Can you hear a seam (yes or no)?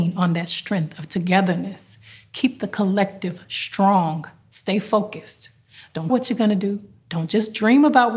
yes